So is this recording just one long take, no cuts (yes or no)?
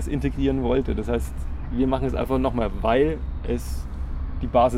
yes